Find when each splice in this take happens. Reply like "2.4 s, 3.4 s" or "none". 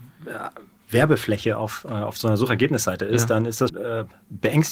3.7 s